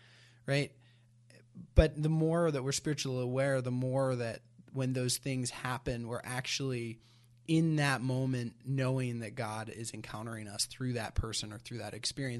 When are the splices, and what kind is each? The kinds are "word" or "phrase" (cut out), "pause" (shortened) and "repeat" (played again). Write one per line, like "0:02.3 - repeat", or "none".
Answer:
none